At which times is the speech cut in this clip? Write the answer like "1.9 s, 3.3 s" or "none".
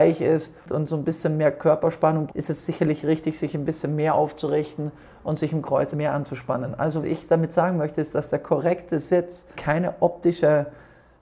2.3 s, 5.9 s, 7.0 s, 9.5 s